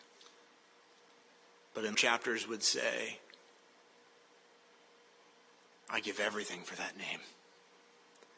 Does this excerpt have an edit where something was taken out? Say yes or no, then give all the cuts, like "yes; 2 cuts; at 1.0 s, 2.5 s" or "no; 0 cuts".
yes; 1 cut; at 1.9 s